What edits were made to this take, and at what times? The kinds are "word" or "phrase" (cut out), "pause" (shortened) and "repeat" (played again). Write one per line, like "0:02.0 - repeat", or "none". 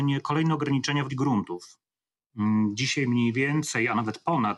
0:01.1 - word